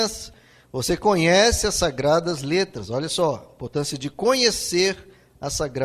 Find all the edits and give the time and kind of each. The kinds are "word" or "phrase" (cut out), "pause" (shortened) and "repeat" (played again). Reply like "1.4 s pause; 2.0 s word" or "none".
none

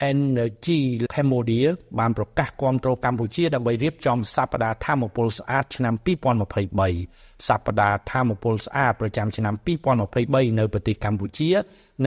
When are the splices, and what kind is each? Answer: 1.1 s word

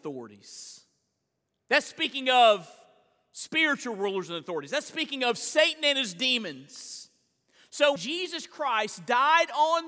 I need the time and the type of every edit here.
8.0 s word

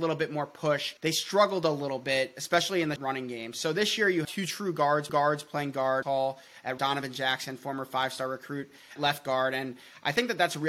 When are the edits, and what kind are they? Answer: 1.0 s pause; 3.0 s word; 4.2 s word; 5.1 s repeat; 6.0 s phrase; 6.8 s phrase; 9.0 s word

